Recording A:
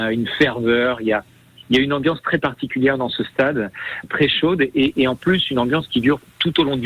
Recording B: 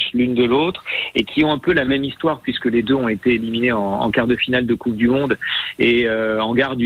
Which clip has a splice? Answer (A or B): A